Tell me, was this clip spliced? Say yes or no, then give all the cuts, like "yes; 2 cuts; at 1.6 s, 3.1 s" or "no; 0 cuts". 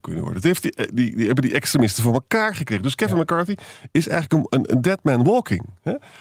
no; 0 cuts